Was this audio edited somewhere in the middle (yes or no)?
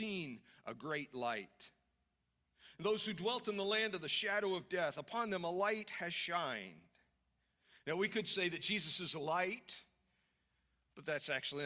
no